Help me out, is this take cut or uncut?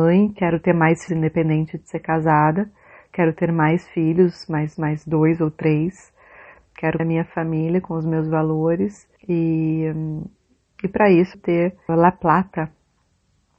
cut